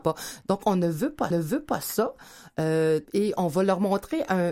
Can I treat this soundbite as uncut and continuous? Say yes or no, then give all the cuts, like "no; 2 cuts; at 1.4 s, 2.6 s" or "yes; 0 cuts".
no; 2 cuts; at 1.3 s, 3.0 s